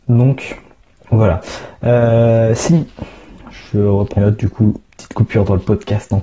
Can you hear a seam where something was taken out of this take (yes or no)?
yes